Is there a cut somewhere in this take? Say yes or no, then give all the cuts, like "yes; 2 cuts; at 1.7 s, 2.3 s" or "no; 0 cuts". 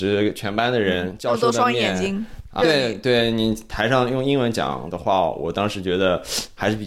yes; 1 cut; at 2.6 s